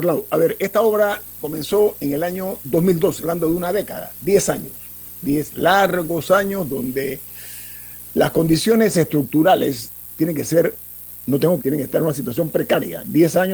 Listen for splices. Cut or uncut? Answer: cut